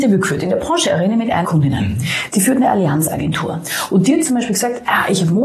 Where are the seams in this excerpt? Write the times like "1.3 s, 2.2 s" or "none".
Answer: 1.4 s